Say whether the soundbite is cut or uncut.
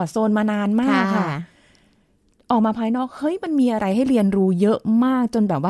uncut